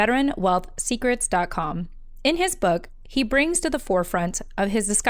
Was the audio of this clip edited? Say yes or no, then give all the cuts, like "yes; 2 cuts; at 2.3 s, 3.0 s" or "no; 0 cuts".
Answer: no; 0 cuts